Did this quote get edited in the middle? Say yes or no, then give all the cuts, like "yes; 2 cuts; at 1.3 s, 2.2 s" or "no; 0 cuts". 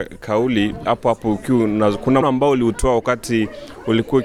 yes; 1 cut; at 2.2 s